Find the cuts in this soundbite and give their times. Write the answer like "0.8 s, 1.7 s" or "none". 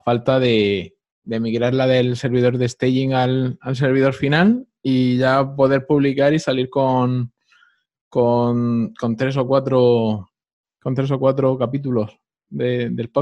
1.0 s